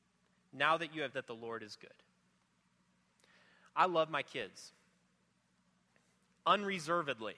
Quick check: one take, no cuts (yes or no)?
no